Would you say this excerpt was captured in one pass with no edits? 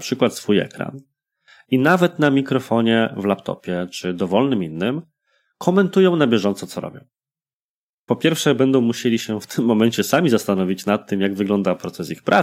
yes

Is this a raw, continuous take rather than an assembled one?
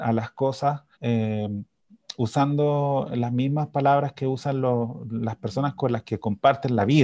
no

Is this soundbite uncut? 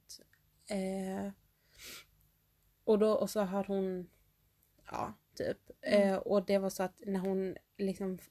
yes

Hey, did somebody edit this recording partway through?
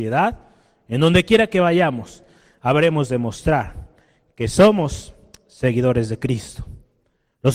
no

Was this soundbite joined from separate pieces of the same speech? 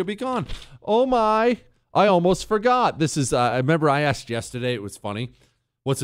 no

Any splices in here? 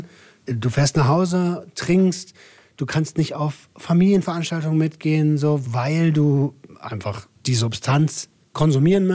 yes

